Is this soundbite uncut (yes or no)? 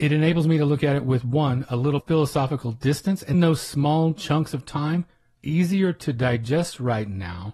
no